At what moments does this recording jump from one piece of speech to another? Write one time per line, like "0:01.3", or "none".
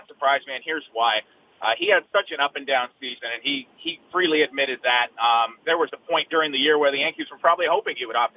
none